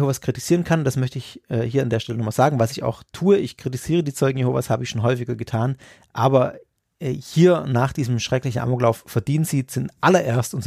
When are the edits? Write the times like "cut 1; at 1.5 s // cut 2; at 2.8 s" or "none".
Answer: none